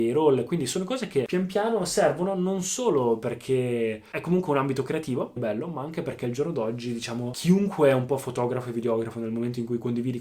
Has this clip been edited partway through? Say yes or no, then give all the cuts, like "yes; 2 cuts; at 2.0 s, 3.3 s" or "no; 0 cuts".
yes; 2 cuts; at 4.1 s, 5.4 s